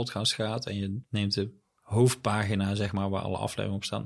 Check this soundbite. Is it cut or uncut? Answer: uncut